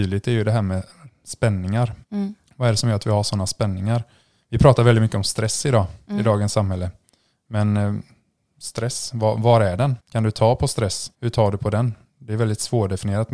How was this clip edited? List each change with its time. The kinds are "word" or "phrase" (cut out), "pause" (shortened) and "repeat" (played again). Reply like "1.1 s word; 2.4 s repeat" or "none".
2.0 s pause; 10.0 s pause; 11.1 s pause